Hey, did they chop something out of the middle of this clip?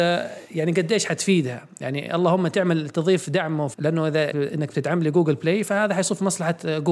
yes; 2 cuts; at 3.7 s, 4.3 s

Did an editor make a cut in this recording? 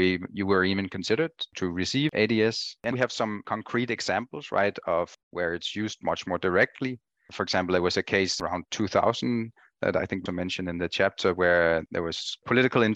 yes; 3 cuts; at 2.9 s, 8.7 s, 10.3 s

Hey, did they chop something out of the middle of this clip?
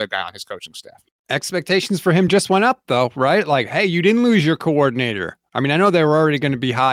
no; 0 cuts

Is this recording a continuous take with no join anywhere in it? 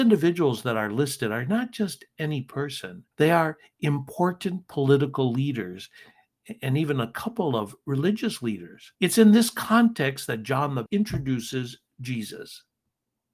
no; 3 cuts; at 3.1 s, 9.0 s, 10.9 s

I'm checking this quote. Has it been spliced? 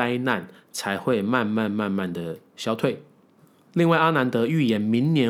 no; 0 cuts

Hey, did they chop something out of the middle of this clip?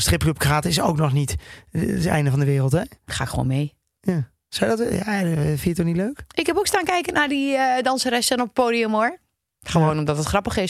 no; 0 cuts

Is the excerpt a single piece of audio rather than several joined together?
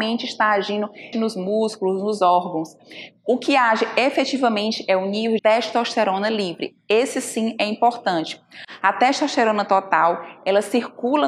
no; 2 cuts; at 1.1 s, 5.4 s

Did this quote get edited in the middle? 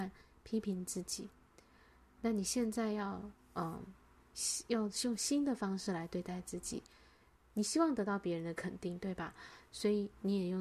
no; 0 cuts

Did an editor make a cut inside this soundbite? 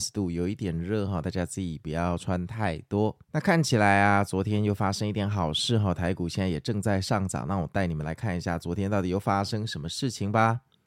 yes; 1 cut; at 3.2 s

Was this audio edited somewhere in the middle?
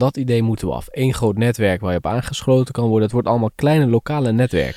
no; 0 cuts

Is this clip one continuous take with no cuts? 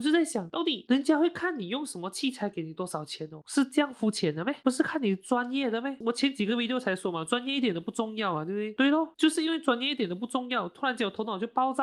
yes; 0 cuts

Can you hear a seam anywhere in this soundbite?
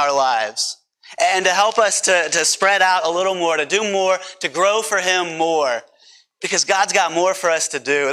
no; 0 cuts

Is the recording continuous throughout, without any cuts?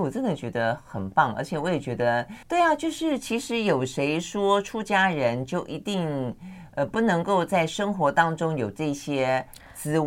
no; 1 cut; at 2.4 s

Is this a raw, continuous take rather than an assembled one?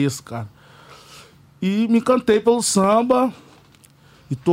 yes; 0 cuts

